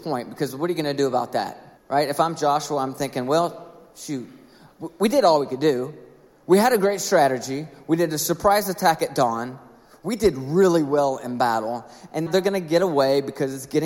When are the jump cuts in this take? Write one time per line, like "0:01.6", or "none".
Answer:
0:01.8
0:12.3

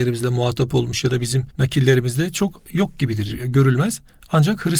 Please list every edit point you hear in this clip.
0:01.5

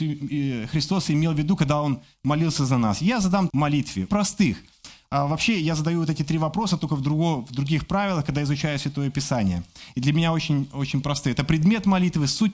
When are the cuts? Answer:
0:03.5
0:04.1

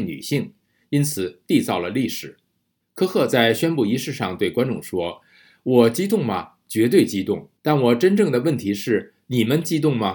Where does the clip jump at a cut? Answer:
0:07.6

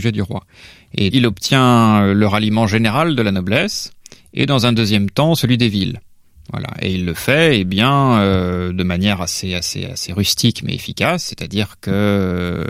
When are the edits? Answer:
0:01.1
0:09.9

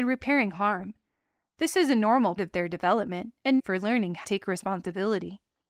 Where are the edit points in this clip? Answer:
0:02.4
0:03.6
0:04.2

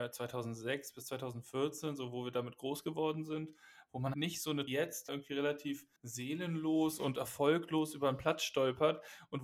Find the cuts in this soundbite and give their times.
0:04.1
0:04.7
0:05.1
0:06.0

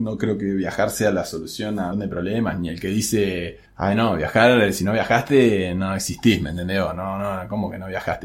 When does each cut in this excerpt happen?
0:01.9
0:03.7

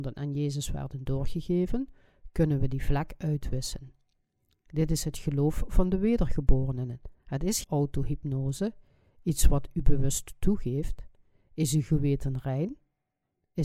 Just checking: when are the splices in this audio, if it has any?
0:07.2
0:07.6

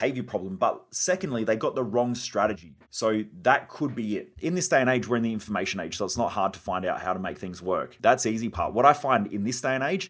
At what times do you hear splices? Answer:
0:02.8

